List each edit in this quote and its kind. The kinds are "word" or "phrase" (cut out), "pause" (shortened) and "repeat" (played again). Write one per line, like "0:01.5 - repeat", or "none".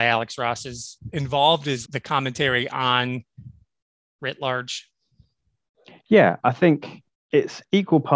0:01.1 - word
0:01.8 - word
0:04.2 - word
0:07.1 - word